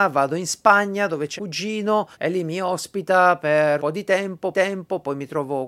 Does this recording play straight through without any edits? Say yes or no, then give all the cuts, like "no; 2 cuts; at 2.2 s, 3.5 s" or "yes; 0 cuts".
no; 4 cuts; at 1.4 s, 2.1 s, 3.8 s, 4.5 s